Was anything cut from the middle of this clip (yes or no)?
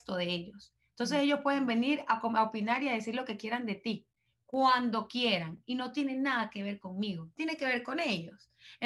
no